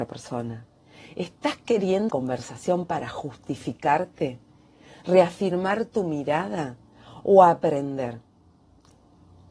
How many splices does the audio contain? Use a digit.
1